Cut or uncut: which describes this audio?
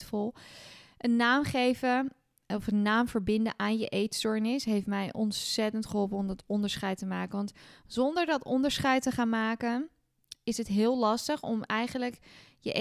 uncut